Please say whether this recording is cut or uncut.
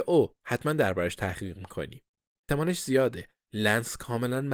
uncut